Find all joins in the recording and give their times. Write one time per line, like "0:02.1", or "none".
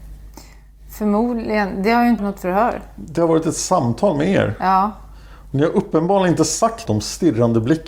0:02.2
0:06.9